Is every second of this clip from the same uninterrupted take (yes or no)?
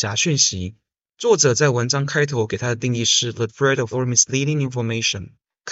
no